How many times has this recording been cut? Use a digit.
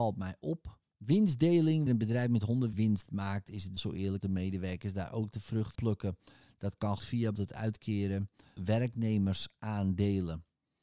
8